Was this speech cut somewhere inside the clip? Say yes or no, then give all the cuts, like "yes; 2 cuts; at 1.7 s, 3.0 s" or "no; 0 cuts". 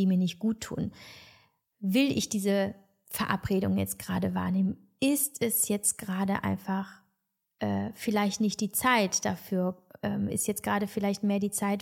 no; 0 cuts